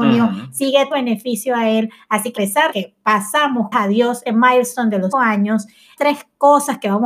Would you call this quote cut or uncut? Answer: cut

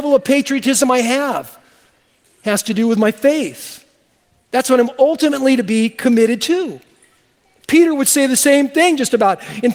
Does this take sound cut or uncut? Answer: uncut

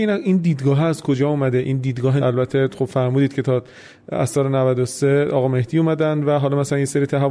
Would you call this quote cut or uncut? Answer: cut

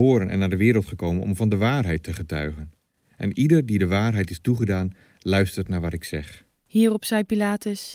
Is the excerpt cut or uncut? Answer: uncut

